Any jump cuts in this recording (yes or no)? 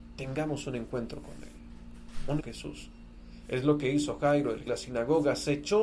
yes